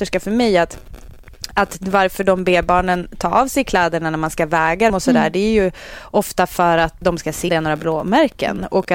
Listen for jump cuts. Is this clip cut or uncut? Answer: cut